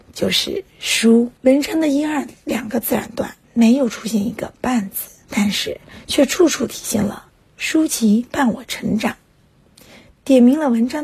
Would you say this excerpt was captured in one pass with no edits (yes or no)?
no